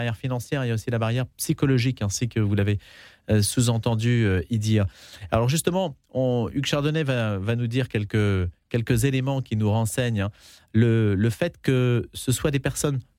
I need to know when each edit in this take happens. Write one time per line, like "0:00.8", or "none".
none